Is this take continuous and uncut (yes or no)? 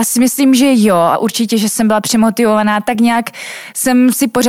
yes